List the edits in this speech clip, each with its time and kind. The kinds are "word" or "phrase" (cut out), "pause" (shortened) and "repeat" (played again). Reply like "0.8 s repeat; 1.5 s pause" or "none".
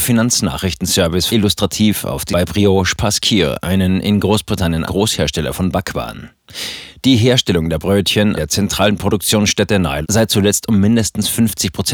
1.3 s word; 2.3 s word; 4.9 s word; 8.4 s word; 10.0 s word